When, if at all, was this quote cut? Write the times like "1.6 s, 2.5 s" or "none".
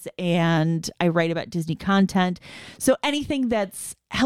none

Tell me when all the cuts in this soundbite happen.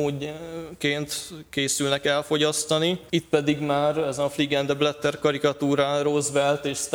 3.1 s

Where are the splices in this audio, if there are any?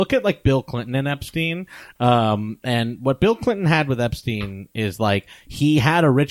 none

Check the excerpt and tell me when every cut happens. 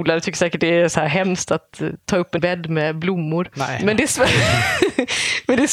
2.4 s

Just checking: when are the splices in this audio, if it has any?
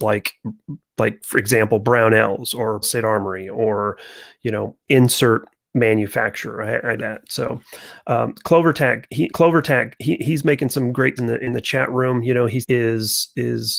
2.8 s, 4.8 s, 7.0 s, 9.3 s, 11.2 s, 12.6 s

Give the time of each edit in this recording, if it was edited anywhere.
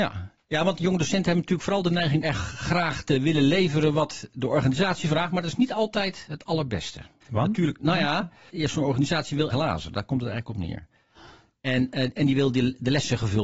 2.2 s, 7.2 s, 8.5 s, 9.5 s

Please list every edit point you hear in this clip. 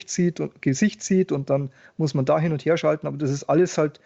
1.8 s

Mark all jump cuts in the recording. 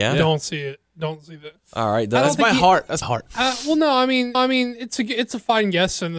3.0 s, 4.3 s

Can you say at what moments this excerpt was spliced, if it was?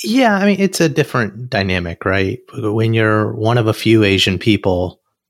none

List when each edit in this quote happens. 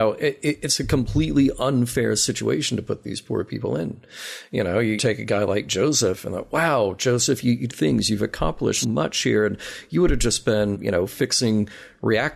5.0 s, 7.7 s, 8.8 s, 10.7 s

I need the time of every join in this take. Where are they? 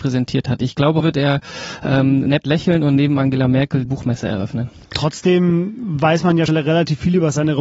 1.0 s, 3.9 s, 6.5 s

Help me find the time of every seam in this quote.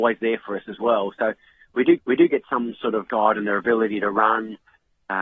2.0 s, 3.1 s

